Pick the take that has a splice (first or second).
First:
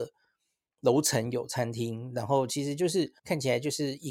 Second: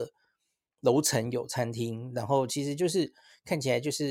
first